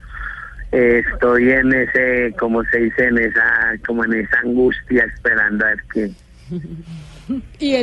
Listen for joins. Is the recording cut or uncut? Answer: uncut